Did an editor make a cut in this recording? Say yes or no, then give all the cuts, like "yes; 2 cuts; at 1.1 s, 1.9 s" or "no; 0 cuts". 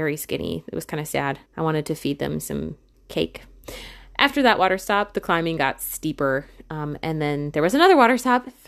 yes; 2 cuts; at 1.5 s, 2.9 s